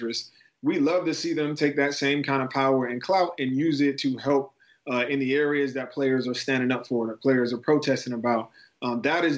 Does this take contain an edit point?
no; 0 cuts

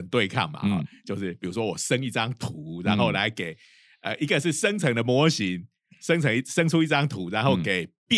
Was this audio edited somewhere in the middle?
no; 0 cuts

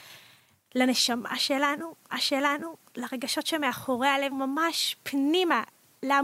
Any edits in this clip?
yes; 2 cuts; at 2.1 s, 4.3 s

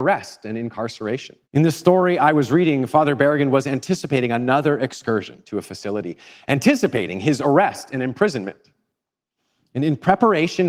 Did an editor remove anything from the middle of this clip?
yes; 2 cuts; at 1.4 s, 5.4 s

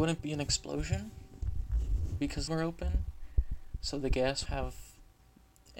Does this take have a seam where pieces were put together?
yes; 2 cuts; at 2.5 s, 4.5 s

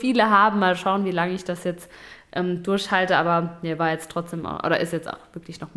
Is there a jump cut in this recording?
no; 0 cuts

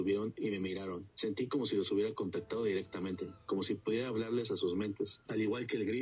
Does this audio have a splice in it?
no; 0 cuts

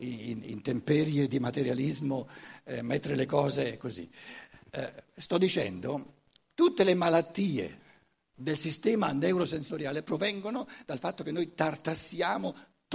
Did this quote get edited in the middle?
no; 0 cuts

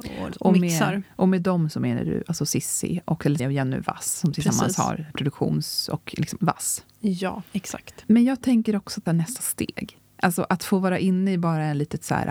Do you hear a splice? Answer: yes; 6 cuts; at 3.4 s, 5.1 s, 6.4 s, 7.5 s, 9.1 s, 10.1 s

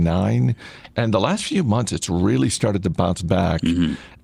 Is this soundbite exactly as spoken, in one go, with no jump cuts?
yes; 0 cuts

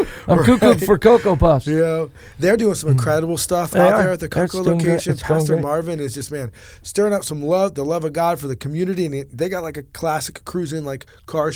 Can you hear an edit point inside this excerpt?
no; 0 cuts

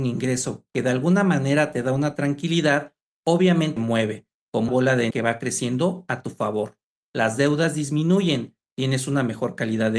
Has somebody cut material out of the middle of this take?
yes; 3 cuts; at 3.8 s, 4.7 s, 5.1 s

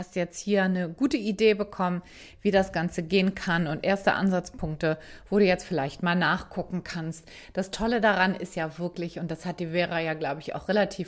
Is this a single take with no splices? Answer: yes; 0 cuts

